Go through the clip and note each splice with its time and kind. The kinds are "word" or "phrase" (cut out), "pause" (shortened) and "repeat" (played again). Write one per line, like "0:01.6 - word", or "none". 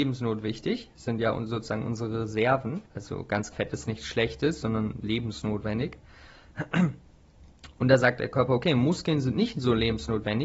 0:02.9 - pause
0:03.5 - word